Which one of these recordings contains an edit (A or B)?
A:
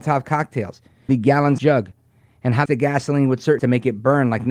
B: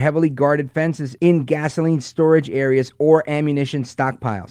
A